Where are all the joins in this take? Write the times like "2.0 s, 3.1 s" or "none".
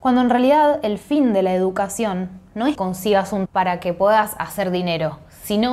2.7 s, 3.5 s